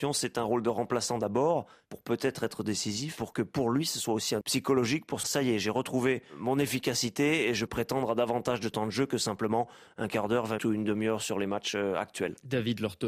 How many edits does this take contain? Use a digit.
4